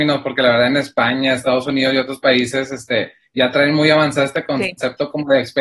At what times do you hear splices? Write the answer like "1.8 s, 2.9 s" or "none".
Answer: none